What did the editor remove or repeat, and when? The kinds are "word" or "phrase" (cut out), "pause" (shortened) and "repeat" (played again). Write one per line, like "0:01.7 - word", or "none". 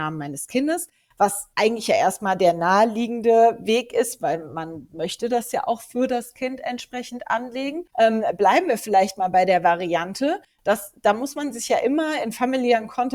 0:01.5 - pause
0:07.9 - pause

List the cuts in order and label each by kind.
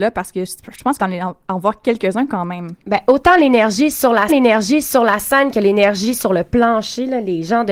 0:01.0 - phrase
0:04.3 - repeat

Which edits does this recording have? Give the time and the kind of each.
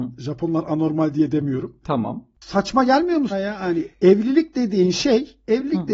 0:03.3 - word
0:03.9 - pause

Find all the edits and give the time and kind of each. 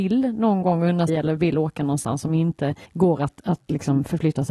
0:01.1 - word
0:02.8 - pause

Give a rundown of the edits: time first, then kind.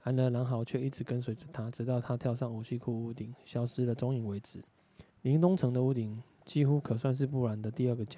0:05.1 - pause

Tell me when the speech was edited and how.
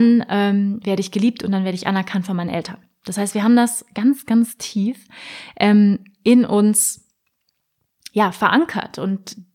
none

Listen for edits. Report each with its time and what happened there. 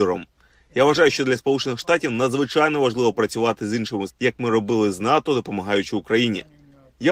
0:04.1 - word

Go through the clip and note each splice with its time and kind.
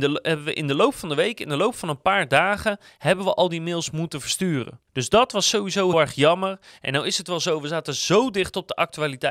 0:04.9 - pause
0:05.9 - word

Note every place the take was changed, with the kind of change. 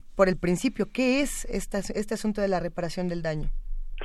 none

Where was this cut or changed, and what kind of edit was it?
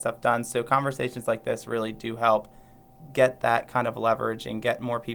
none

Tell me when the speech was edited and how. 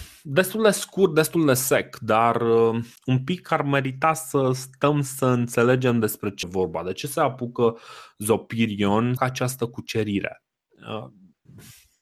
0:03.0 - pause
0:06.4 - word
0:09.2 - phrase

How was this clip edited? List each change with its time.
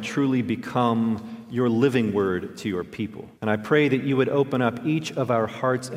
0:03.4 - pause

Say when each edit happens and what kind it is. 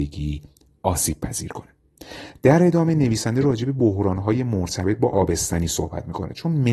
none

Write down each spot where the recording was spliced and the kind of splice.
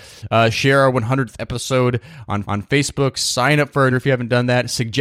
0:02.4 - repeat
0:03.9 - word

